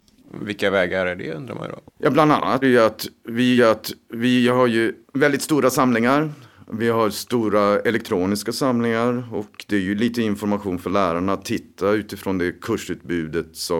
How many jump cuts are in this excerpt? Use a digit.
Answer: 4